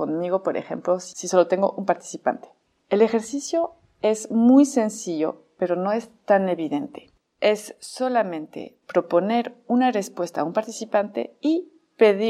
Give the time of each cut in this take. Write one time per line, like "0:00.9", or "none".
none